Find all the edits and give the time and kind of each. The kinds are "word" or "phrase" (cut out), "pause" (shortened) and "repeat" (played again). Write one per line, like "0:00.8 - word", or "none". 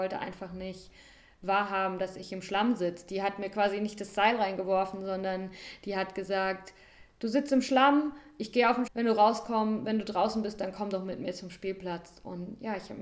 0:08.9 - word